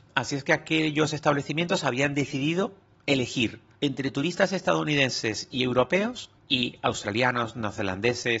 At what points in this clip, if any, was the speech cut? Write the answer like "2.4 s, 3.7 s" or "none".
3.7 s, 6.4 s